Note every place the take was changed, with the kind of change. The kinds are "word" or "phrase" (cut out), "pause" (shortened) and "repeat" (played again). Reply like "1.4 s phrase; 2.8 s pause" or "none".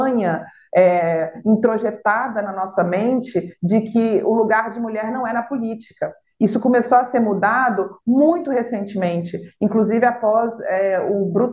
none